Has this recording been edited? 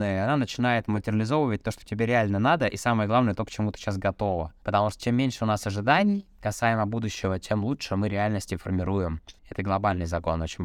yes; 1 cut; at 9.4 s

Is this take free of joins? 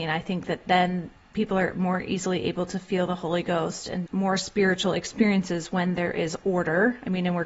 no; 1 cut; at 4.1 s

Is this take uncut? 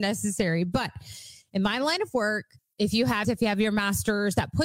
no; 2 cuts; at 2.6 s, 3.2 s

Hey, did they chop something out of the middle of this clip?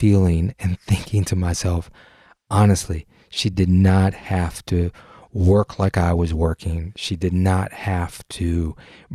no; 0 cuts

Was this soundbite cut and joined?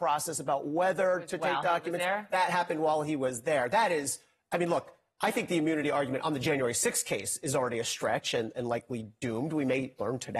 no; 0 cuts

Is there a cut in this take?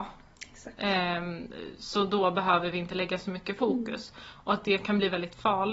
no; 0 cuts

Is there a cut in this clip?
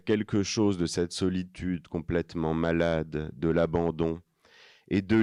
no; 0 cuts

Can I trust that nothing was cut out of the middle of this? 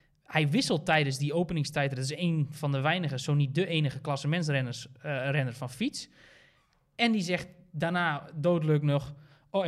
yes; 0 cuts

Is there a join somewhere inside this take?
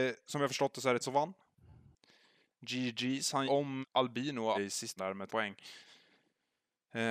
yes; 6 cuts; at 1.0 s, 3.5 s, 3.8 s, 4.5 s, 5.0 s, 5.3 s

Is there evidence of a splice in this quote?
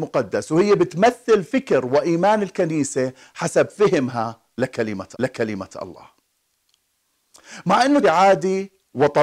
yes; 2 cuts; at 5.1 s, 8.0 s

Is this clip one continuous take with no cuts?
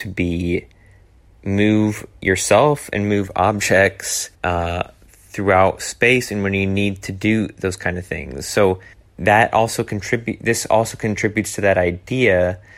no; 2 cuts; at 4.3 s, 8.9 s

